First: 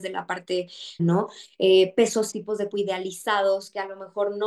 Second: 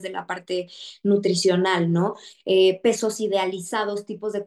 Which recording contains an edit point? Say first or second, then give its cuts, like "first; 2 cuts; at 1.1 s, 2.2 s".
first; 3 cuts; at 1.0 s, 2.3 s, 2.7 s